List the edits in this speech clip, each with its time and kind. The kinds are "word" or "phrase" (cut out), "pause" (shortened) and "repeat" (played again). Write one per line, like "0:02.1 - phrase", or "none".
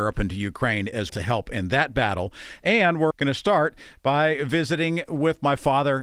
0:01.1 - word
0:03.1 - word